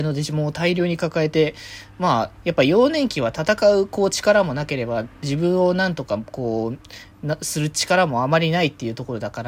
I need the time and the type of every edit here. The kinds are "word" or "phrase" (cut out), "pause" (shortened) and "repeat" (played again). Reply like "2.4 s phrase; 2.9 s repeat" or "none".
none